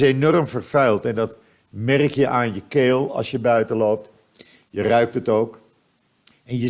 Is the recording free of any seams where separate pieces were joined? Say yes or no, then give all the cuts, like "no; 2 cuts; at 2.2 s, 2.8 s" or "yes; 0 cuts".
yes; 0 cuts